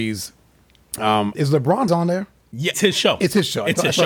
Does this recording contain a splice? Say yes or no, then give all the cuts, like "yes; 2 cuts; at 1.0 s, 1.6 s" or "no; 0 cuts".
yes; 3 cuts; at 1.3 s, 1.9 s, 2.7 s